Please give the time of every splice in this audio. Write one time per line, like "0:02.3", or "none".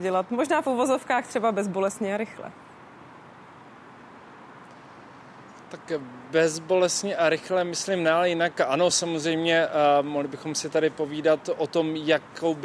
none